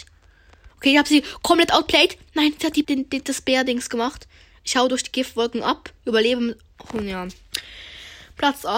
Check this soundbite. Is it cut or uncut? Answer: cut